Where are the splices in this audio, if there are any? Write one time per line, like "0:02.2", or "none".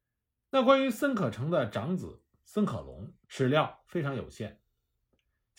0:03.2